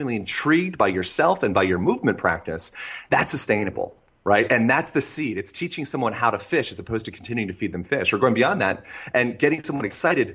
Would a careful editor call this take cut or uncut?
cut